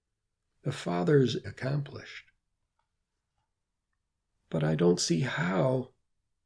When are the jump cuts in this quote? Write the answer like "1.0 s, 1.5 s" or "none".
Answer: 1.4 s